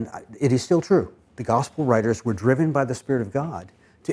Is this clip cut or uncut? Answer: uncut